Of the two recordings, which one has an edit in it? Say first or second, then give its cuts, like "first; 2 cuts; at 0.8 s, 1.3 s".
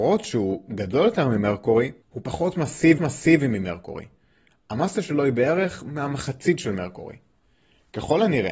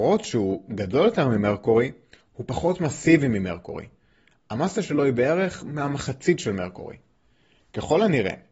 first; 2 cuts; at 2.0 s, 3.0 s